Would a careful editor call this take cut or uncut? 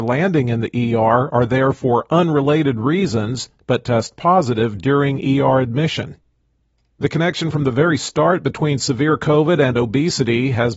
uncut